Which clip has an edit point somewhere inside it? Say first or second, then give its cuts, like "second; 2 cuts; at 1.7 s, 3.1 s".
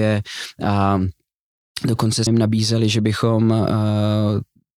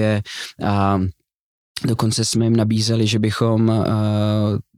first; 1 cut; at 2.3 s